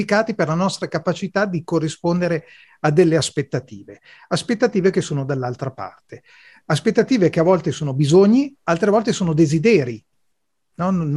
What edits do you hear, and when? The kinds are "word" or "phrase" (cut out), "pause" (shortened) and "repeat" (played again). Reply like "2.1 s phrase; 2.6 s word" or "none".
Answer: none